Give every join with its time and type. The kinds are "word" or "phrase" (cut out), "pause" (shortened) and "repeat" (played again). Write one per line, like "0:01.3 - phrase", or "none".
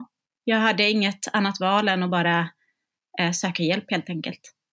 none